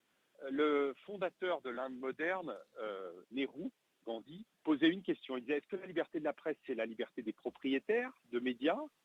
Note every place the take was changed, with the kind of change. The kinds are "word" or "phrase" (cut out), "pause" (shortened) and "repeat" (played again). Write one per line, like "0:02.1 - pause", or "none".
0:03.2 - pause
0:04.5 - pause